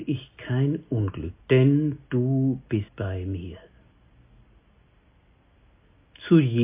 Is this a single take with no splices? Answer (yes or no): no